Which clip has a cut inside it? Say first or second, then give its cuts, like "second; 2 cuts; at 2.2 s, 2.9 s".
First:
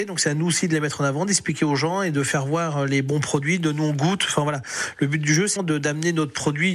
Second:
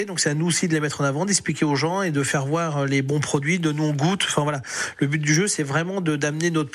first; 1 cut; at 5.6 s